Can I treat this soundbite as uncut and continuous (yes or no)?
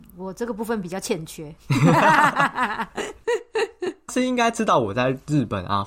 no